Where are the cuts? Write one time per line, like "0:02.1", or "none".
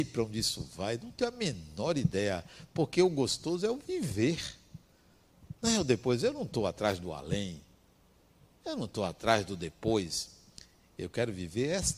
none